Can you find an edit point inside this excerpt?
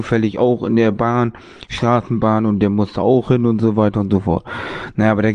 no; 0 cuts

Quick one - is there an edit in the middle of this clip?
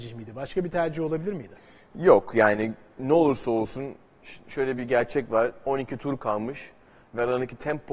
no; 0 cuts

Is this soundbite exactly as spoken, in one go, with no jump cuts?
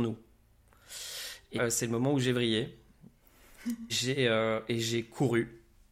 no; 2 cuts; at 1.6 s, 3.9 s

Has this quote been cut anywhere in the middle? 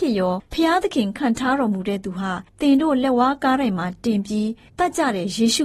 yes; 1 cut; at 2.5 s

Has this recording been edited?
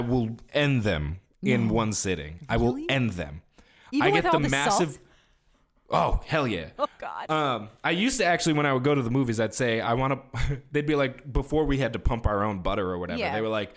no; 0 cuts

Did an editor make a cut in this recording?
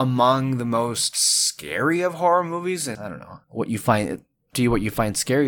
yes; 3 cuts; at 2.9 s, 3.4 s, 4.5 s

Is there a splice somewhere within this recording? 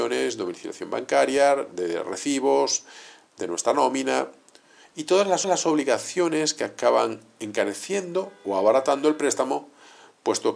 yes; 1 cut; at 5.4 s

